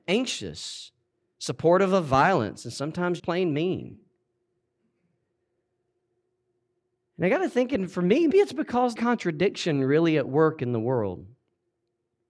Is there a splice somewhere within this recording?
yes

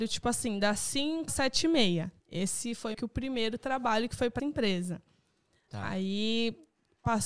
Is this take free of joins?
no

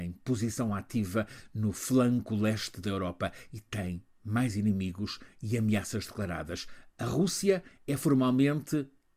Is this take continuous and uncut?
yes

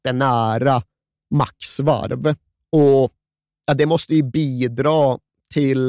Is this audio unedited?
yes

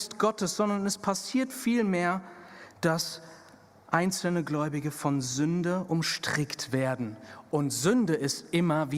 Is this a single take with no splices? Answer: yes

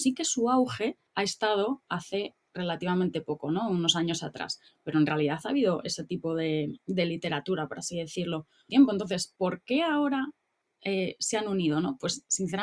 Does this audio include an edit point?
yes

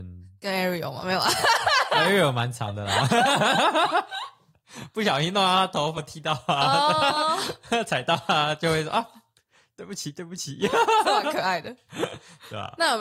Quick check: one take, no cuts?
no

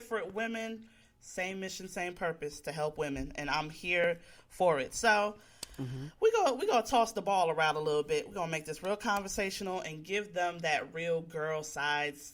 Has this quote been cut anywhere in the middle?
no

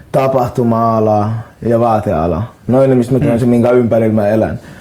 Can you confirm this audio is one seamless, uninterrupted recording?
no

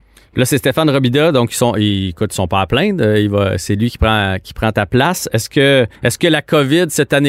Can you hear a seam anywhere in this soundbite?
yes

